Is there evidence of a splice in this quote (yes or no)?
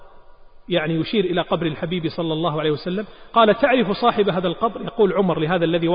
no